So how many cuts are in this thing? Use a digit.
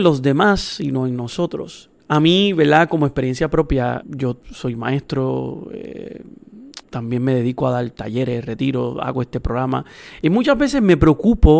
4